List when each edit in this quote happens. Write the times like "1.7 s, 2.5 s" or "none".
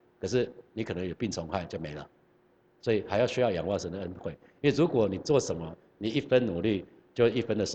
none